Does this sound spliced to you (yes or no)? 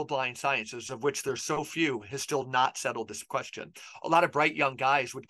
no